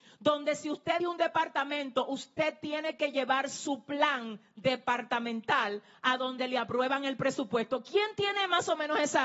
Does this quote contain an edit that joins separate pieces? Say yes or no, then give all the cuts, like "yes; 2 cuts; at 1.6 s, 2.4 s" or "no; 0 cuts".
yes; 1 cut; at 1.0 s